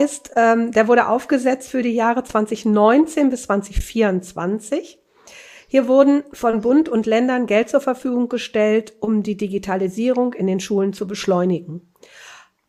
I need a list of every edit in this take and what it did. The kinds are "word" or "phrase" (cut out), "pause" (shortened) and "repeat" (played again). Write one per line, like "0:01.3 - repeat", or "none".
none